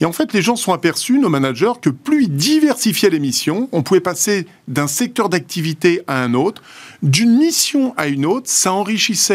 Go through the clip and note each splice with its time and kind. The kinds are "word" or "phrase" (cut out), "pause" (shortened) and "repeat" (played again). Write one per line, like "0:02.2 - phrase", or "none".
none